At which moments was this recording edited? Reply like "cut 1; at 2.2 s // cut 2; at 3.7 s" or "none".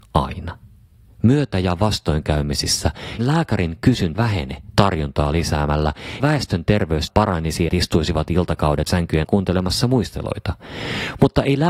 cut 1; at 3.2 s // cut 2; at 4.1 s // cut 3; at 6.2 s // cut 4; at 7.1 s // cut 5; at 7.7 s // cut 6; at 8.9 s // cut 7; at 9.2 s